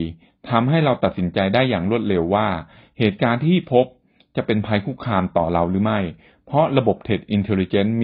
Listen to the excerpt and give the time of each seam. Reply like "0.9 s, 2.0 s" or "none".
none